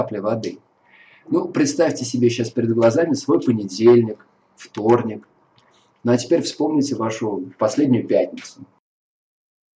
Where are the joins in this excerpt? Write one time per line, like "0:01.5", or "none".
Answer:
none

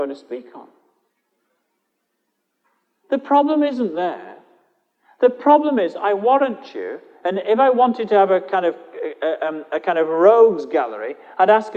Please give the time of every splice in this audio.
none

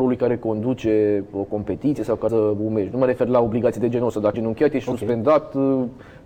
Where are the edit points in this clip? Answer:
0:02.3
0:04.3

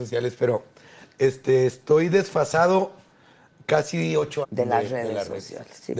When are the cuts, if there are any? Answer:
0:04.4

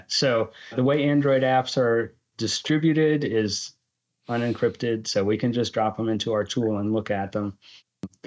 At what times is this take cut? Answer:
none

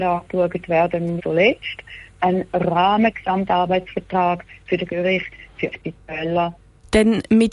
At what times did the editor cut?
0:01.2
0:04.9
0:05.7

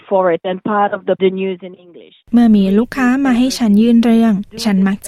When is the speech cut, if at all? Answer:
0:01.2

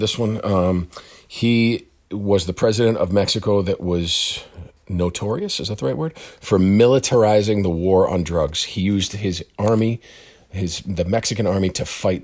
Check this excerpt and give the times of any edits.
none

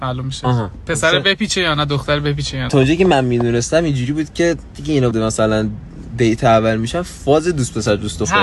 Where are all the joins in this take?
0:02.7
0:04.7
0:05.1

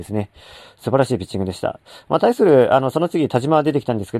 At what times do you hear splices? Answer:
none

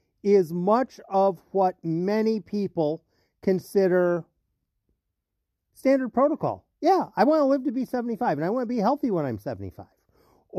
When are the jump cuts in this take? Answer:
none

